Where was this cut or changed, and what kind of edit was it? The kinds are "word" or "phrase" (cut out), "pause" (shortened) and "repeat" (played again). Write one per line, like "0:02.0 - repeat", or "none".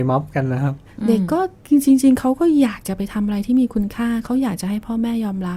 0:01.6 - pause